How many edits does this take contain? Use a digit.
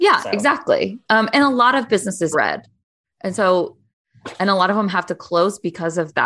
1